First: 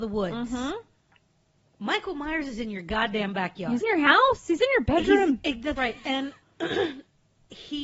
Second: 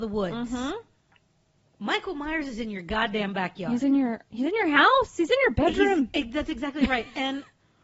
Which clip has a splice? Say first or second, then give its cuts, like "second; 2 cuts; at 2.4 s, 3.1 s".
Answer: first; 3 cuts; at 3.8 s, 5.8 s, 6.4 s